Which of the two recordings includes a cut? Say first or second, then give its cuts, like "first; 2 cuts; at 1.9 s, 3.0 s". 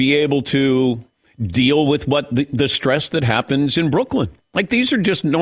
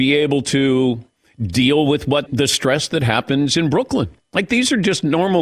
second; 1 cut; at 2.3 s